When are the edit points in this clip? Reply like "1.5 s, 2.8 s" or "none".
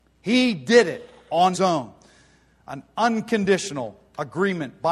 1.5 s